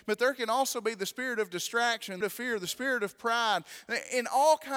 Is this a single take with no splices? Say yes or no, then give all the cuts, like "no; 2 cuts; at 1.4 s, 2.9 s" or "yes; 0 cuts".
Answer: no; 1 cut; at 2.2 s